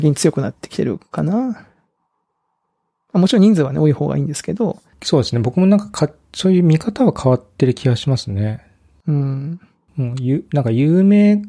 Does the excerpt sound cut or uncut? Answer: uncut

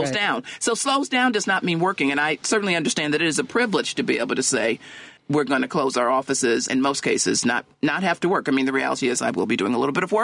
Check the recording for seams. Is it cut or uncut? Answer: cut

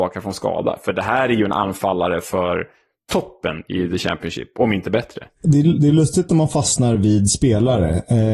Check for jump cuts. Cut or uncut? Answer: uncut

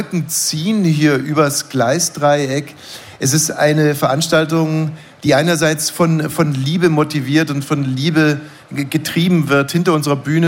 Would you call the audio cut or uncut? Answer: uncut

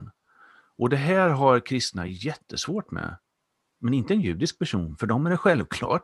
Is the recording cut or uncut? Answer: uncut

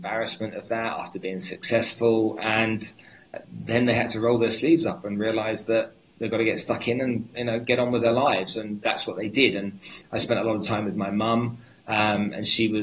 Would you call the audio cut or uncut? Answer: uncut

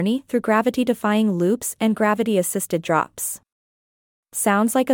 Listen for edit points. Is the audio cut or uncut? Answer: uncut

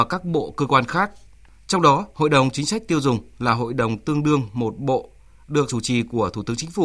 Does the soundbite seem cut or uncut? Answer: cut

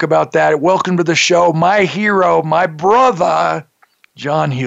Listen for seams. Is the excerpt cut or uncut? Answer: uncut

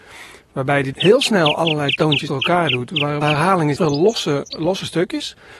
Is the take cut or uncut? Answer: cut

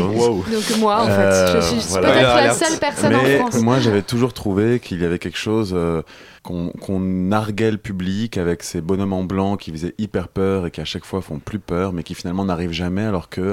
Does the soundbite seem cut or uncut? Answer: cut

